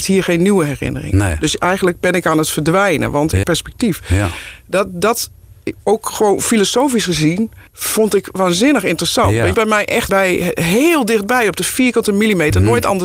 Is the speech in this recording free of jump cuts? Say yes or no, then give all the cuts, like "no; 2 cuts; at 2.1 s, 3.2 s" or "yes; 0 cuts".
no; 5 cuts; at 3.4 s, 5.8 s, 7.7 s, 9.5 s, 10.1 s